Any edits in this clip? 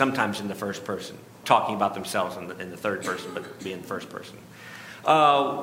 yes; 1 cut; at 1.4 s

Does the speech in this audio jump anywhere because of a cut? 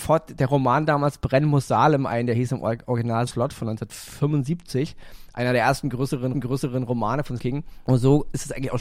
yes; 3 cuts; at 3.3 s, 6.3 s, 7.4 s

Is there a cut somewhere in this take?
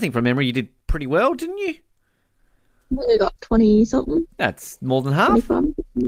yes; 1 cut; at 3.4 s

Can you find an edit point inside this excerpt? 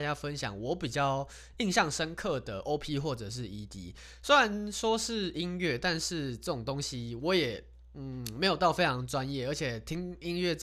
no; 0 cuts

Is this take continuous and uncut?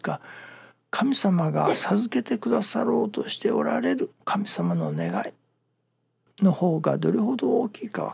no; 1 cut; at 4.2 s

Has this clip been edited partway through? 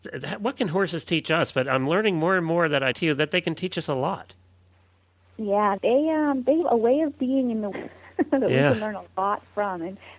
yes; 4 cuts; at 2.9 s, 5.8 s, 6.6 s, 7.7 s

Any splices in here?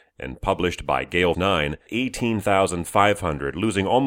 yes; 2 cuts; at 1.3 s, 1.9 s

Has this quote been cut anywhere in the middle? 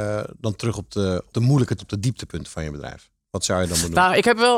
yes; 2 cuts; at 1.3 s, 1.8 s

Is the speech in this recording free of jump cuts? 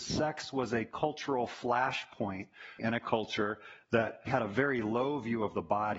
no; 2 cuts; at 2.8 s, 4.3 s

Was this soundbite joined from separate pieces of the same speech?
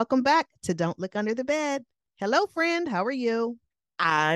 no; 0 cuts

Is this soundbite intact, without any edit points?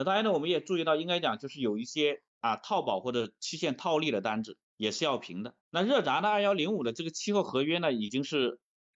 no; 3 cuts; at 2.3 s, 4.6 s, 5.6 s

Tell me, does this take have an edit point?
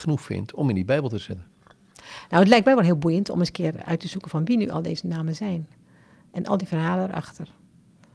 no; 0 cuts

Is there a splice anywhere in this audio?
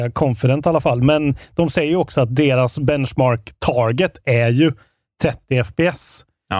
no; 0 cuts

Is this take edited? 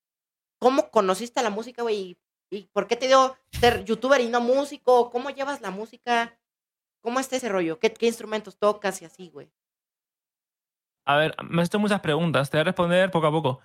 no; 0 cuts

